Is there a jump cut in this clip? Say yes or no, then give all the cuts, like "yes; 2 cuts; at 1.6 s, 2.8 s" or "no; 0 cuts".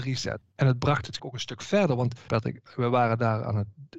yes; 2 cuts; at 1.2 s, 2.3 s